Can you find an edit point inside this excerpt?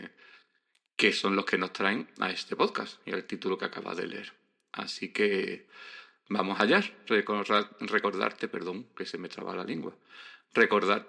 no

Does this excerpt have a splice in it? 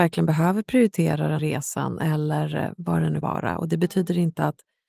yes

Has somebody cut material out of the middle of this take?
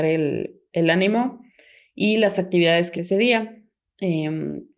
yes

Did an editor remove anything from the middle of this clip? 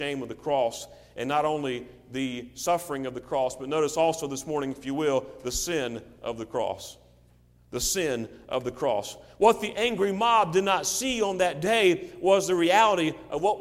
no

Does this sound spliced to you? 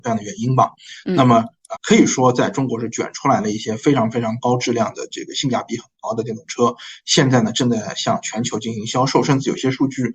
yes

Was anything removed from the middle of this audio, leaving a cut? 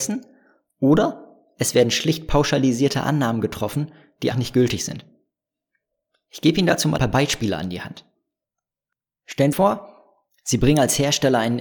yes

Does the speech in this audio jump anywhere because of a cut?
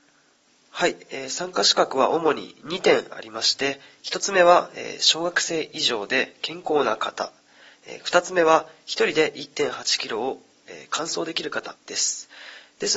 yes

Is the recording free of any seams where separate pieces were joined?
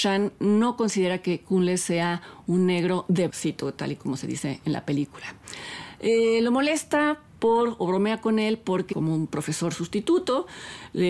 no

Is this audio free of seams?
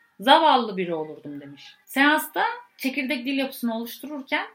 no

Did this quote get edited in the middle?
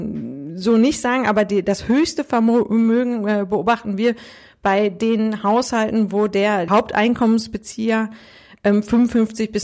no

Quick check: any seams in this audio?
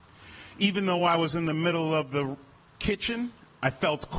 no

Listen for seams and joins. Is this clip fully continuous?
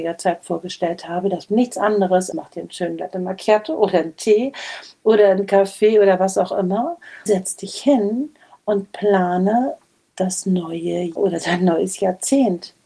no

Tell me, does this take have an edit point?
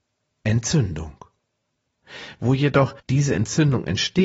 yes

